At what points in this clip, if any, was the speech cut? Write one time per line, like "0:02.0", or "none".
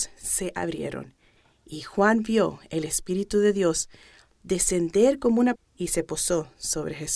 0:05.5

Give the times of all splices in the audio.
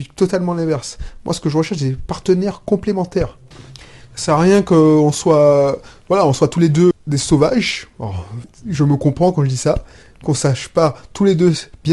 0:06.9

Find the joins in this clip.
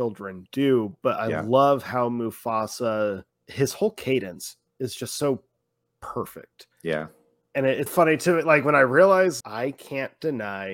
0:03.3
0:06.7
0:07.9
0:09.4

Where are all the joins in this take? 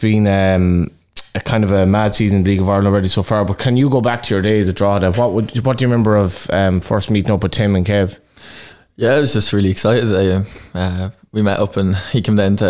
none

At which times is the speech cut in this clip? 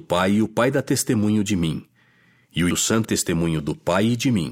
0:02.7
0:03.0

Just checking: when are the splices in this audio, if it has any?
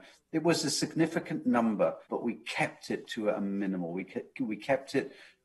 0:02.1

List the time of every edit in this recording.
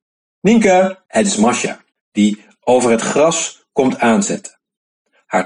0:01.1
0:01.9

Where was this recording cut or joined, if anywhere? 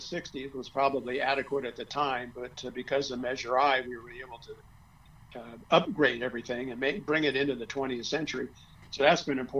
none

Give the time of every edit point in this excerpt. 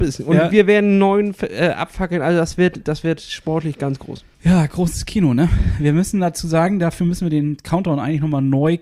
0:04.3

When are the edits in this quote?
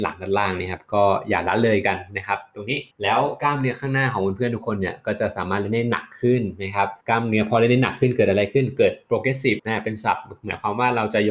0:02.9
0:07.0
0:09.6

